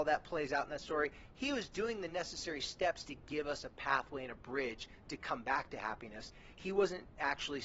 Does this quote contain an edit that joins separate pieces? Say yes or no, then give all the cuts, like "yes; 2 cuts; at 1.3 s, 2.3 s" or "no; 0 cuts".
no; 0 cuts